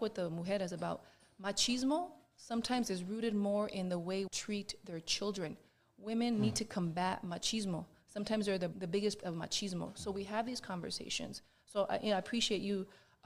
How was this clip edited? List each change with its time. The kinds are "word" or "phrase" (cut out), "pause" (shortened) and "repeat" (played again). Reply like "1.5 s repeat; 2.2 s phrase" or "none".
4.3 s word; 8.7 s word; 9.2 s word